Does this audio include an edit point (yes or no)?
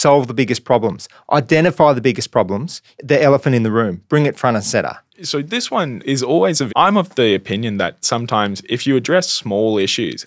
yes